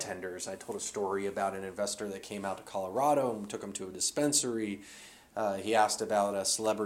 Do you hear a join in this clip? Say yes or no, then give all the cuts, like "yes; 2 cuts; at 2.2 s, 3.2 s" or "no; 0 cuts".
no; 0 cuts